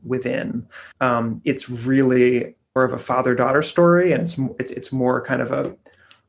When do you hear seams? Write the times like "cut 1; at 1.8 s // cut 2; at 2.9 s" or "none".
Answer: cut 1; at 0.9 s // cut 2; at 2.8 s